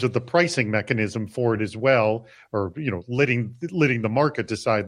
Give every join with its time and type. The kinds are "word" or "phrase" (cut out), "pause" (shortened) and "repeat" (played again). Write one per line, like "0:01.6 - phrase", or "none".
none